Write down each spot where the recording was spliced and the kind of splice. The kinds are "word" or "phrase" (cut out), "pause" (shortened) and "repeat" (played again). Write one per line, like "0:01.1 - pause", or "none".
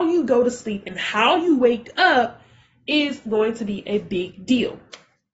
none